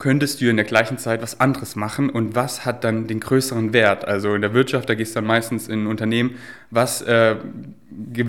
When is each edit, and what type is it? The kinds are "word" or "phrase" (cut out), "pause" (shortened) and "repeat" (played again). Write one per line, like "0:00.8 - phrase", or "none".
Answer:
none